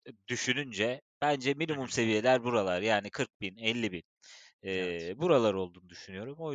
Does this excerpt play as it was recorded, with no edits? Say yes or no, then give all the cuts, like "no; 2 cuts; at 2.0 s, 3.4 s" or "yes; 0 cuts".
yes; 0 cuts